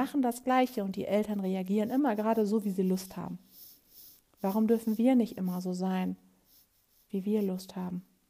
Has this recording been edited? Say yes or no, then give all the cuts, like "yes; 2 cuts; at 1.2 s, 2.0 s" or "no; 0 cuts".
no; 0 cuts